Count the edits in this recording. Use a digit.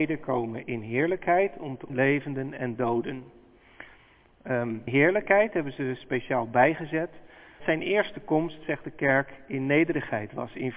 3